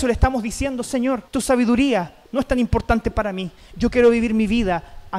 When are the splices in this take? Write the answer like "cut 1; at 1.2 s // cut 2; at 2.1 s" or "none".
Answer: cut 1; at 1.3 s // cut 2; at 2.3 s